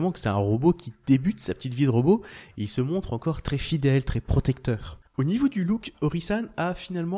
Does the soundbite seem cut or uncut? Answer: cut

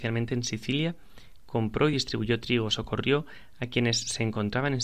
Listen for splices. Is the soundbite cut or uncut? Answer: uncut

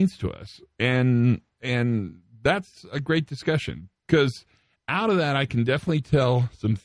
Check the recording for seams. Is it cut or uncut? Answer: uncut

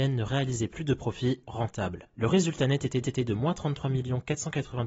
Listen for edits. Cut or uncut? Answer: cut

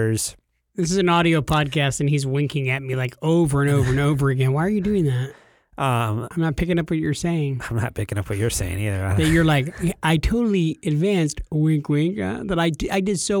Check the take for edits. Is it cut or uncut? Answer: uncut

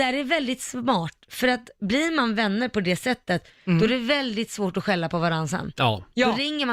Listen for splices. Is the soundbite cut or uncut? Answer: uncut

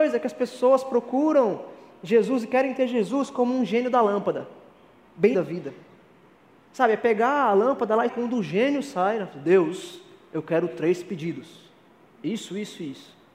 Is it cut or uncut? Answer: cut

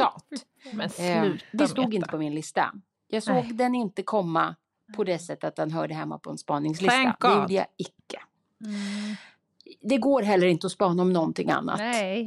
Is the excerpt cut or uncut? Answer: uncut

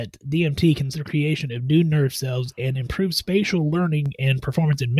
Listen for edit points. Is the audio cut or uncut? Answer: cut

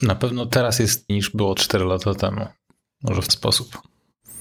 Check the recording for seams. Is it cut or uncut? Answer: cut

